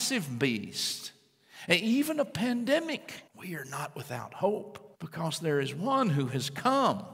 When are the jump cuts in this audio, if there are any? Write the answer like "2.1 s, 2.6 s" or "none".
3.3 s, 4.9 s

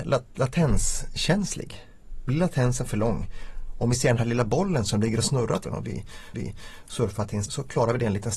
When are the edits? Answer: 5.6 s, 6.3 s, 7.5 s

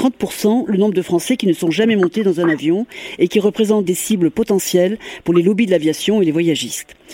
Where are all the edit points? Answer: 3.9 s

